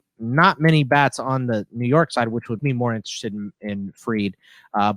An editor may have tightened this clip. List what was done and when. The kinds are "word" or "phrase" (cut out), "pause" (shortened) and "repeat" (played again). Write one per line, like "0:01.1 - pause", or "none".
0:02.6 - word